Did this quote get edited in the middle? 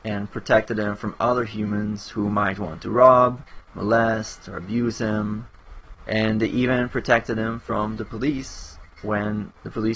no; 0 cuts

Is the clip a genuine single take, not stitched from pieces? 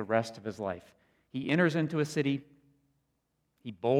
yes; 0 cuts

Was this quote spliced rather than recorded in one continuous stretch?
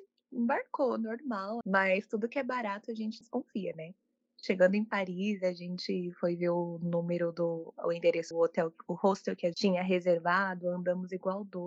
yes; 4 cuts; at 1.6 s, 3.2 s, 8.3 s, 9.5 s

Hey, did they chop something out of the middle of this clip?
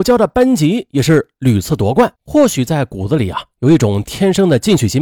yes; 1 cut; at 2.2 s

